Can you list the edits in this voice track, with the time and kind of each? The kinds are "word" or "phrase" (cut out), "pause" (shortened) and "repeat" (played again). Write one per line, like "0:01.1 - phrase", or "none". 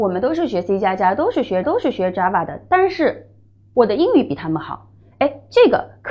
0:01.6 - repeat

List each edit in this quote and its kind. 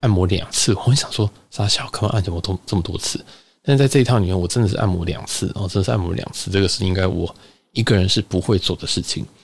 none

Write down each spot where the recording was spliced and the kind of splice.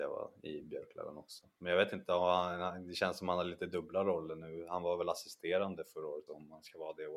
0:06.3 - word

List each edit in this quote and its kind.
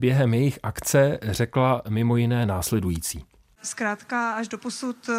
none

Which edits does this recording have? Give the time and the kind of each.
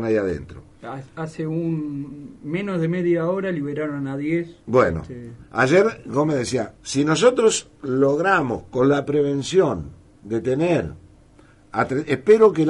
0:06.8 - pause

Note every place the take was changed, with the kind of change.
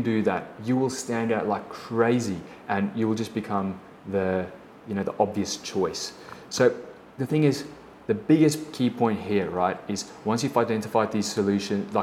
none

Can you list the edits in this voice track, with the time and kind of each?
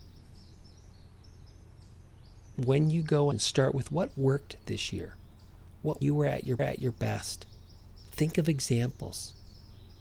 0:03.3 - phrase
0:06.0 - phrase
0:06.6 - repeat

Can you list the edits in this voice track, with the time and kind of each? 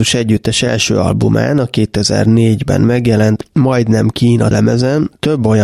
0:04.5 - word

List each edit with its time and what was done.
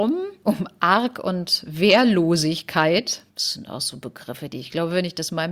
0:03.3 - pause

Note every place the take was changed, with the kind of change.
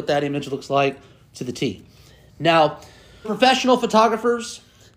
0:03.2 - word

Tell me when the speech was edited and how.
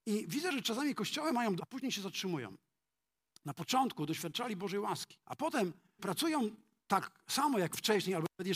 0:01.6 - phrase
0:05.2 - pause
0:06.0 - word

